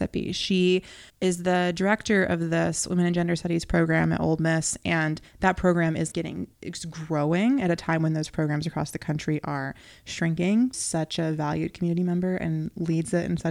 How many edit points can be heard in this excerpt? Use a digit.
4